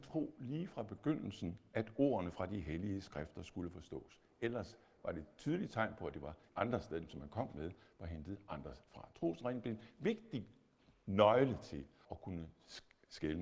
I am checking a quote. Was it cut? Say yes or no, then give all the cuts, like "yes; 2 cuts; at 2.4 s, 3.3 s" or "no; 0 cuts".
yes; 4 cuts; at 6.5 s, 7.1 s, 8.9 s, 12.0 s